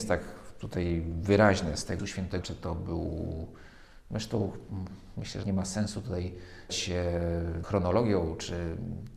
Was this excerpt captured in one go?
no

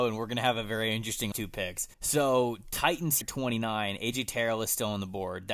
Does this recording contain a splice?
yes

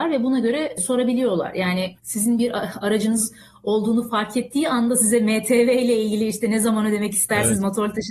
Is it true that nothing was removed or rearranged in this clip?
yes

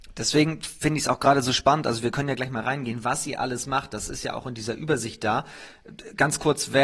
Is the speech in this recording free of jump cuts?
yes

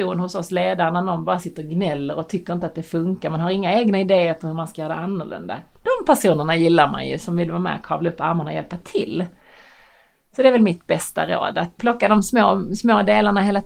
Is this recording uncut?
no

